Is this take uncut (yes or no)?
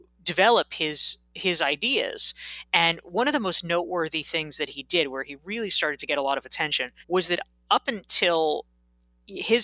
no